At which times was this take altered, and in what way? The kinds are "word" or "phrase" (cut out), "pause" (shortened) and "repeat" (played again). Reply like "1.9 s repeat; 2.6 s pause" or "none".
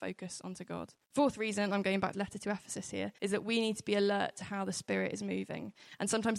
1.0 s pause; 2.1 s phrase; 3.2 s pause